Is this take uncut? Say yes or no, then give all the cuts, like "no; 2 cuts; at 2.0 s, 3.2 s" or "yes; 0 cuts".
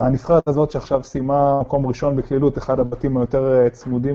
yes; 0 cuts